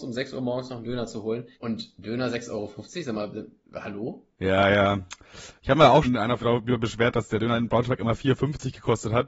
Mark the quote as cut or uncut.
cut